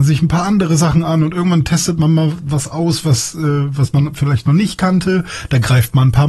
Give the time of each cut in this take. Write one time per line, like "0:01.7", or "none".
none